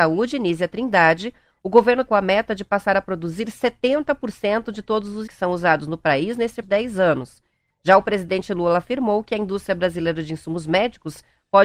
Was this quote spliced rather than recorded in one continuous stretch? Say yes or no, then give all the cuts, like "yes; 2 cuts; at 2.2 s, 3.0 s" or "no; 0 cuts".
yes; 3 cuts; at 2.1 s, 5.3 s, 6.6 s